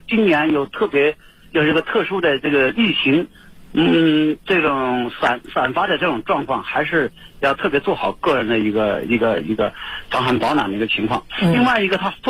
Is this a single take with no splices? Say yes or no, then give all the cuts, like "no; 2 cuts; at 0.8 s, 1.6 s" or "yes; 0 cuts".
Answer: yes; 0 cuts